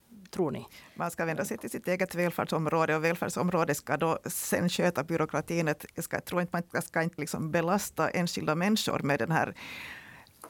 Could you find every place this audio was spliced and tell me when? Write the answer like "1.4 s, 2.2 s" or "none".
7.2 s